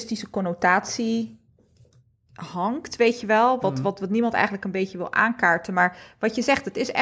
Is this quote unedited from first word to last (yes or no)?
yes